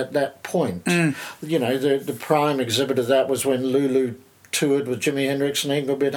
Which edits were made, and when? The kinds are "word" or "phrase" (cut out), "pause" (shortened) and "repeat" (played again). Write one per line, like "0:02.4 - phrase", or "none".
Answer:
none